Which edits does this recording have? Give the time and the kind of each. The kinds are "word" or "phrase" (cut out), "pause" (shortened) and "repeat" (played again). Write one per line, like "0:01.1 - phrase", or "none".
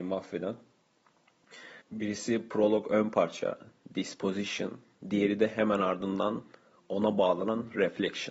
0:01.8 - pause